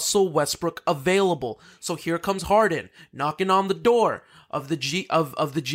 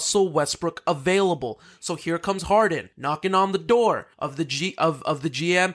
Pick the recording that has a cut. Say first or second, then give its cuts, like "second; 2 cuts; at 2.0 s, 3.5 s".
second; 2 cuts; at 2.9 s, 4.1 s